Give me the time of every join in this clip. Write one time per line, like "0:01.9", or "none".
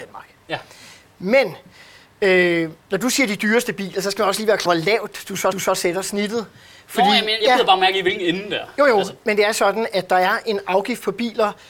0:02.8
0:04.7
0:05.5
0:07.4